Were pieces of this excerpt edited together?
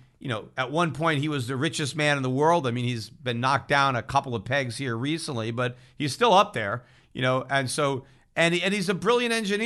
no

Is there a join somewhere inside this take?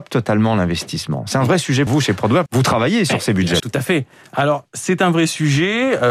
yes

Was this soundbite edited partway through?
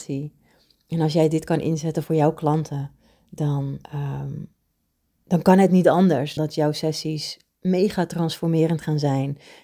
yes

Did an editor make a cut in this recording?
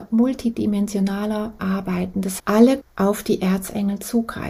yes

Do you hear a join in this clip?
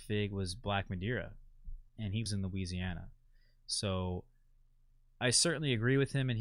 yes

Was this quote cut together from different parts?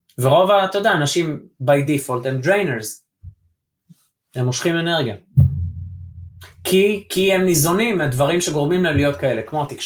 no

